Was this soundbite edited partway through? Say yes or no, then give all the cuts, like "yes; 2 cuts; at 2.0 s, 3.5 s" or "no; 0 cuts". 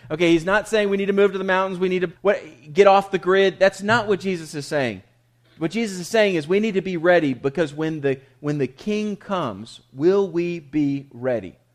yes; 1 cut; at 2.2 s